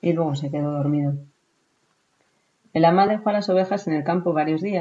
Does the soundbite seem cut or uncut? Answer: uncut